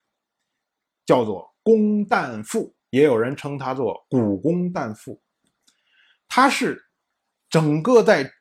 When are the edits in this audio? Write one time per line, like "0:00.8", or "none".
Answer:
0:01.6
0:02.8

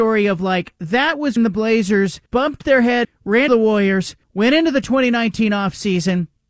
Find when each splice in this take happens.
0:01.4
0:02.3
0:03.0
0:03.5
0:04.2

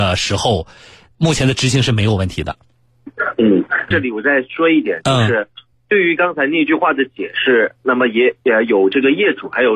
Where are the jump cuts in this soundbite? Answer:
0:03.9

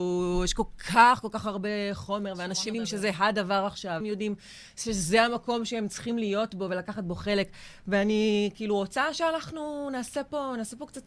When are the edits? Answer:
0:02.7
0:04.0

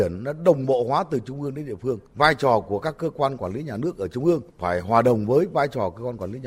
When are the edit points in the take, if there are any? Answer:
0:02.1
0:04.5

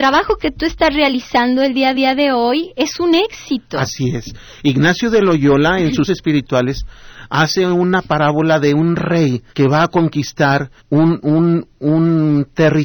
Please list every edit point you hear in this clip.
0:01.9
0:06.1
0:09.5
0:10.8

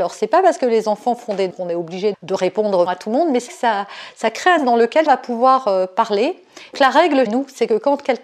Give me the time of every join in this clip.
0:01.5
0:02.1
0:02.9
0:03.5
0:04.6
0:05.1
0:06.7
0:07.3

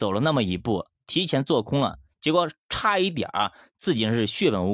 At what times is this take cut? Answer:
none

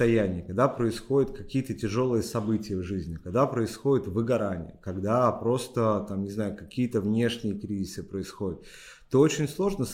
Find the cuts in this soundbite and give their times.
none

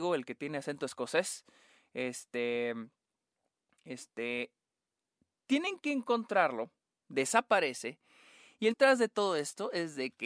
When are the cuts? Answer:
0:08.7

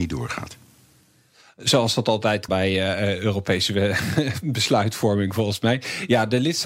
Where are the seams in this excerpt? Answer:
0:02.5

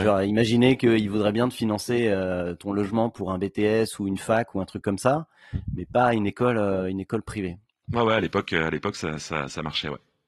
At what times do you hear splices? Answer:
0:07.7

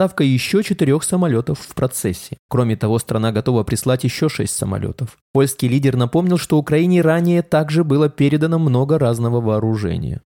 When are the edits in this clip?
none

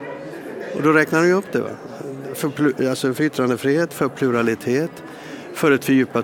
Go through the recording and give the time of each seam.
none

